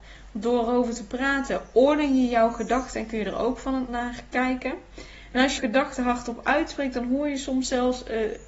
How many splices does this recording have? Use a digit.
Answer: 2